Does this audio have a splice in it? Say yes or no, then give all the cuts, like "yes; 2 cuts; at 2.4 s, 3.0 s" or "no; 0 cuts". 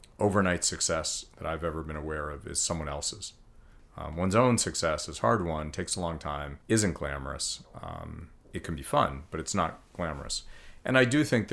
yes; 2 cuts; at 6.6 s, 8.4 s